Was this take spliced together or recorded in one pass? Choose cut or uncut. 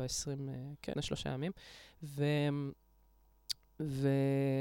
cut